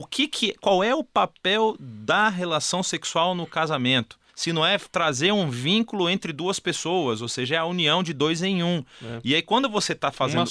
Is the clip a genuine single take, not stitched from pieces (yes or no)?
no